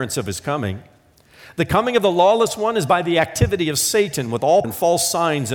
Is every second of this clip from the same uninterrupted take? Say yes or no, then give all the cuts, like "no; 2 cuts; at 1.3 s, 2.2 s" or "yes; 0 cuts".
no; 1 cut; at 4.6 s